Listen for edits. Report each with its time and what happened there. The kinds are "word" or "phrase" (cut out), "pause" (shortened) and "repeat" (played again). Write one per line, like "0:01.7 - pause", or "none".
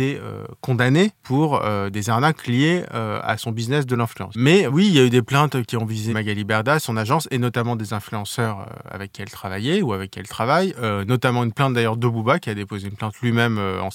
0:01.1 - pause
0:06.1 - word